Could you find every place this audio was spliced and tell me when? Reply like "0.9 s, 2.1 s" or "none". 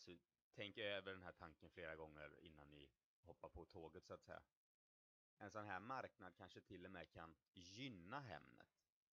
none

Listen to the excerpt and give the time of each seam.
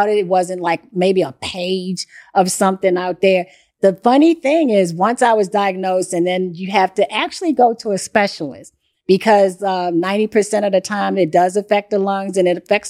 none

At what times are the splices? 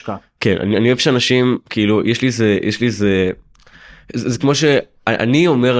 none

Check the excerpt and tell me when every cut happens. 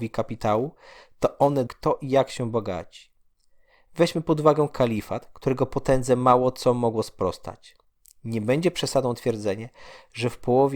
1.7 s

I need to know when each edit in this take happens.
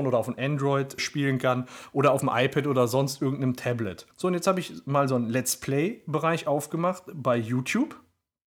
1.0 s, 4.1 s

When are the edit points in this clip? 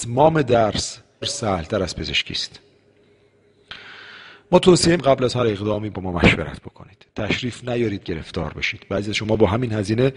1.2 s, 5.0 s, 8.0 s

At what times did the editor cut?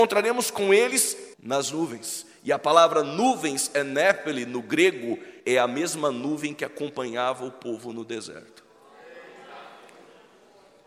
1.3 s, 5.4 s

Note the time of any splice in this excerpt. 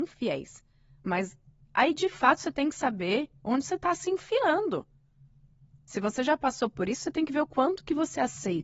none

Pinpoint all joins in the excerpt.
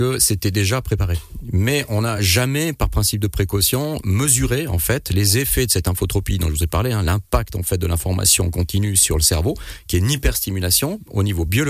none

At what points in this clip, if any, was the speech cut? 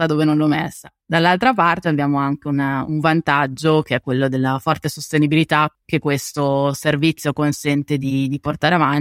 1.8 s

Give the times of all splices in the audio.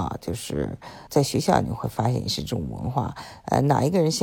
1.1 s

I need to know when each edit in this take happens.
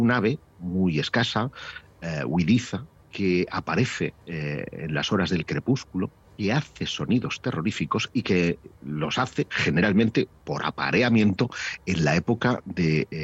3.0 s, 4.2 s, 6.2 s

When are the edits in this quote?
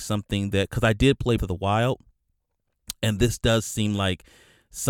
1.4 s

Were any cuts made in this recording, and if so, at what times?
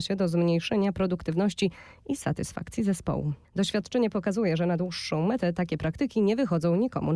none

